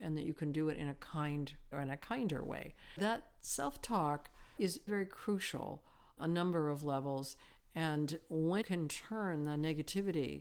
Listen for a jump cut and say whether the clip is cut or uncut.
cut